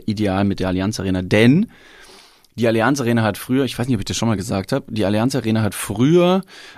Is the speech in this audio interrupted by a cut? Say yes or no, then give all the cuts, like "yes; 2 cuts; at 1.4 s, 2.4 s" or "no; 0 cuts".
no; 0 cuts